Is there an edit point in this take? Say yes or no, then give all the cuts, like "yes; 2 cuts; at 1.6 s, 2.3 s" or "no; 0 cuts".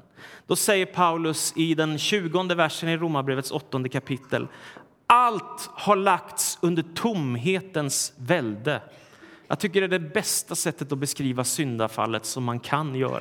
no; 0 cuts